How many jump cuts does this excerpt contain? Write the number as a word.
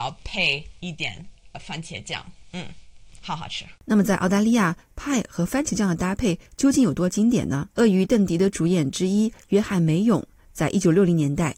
two